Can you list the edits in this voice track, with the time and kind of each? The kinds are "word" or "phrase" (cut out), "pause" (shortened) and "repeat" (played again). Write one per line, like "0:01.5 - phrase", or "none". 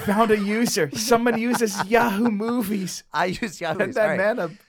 0:03.7 - word